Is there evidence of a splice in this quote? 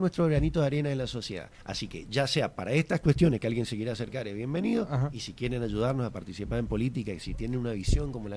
yes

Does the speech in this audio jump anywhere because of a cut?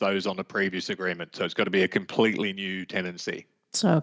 no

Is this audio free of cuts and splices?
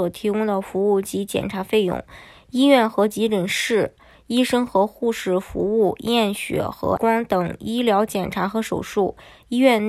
no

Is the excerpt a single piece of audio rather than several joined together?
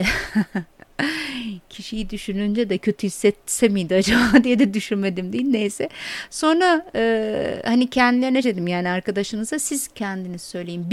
no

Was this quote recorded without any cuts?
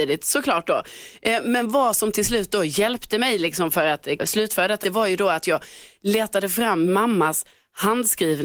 no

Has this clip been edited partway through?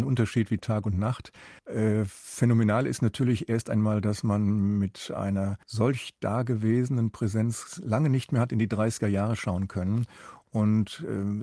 yes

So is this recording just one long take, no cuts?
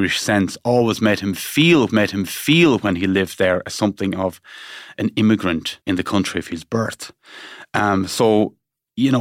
no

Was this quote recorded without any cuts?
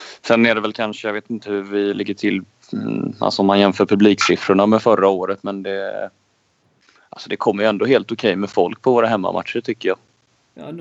yes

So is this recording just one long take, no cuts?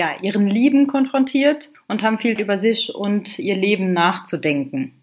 no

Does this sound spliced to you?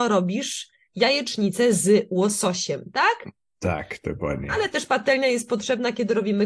no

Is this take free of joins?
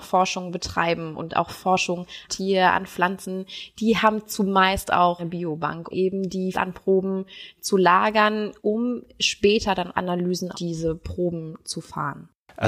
no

